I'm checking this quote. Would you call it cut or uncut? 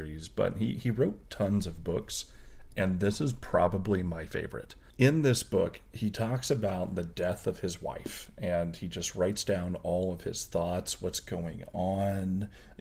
uncut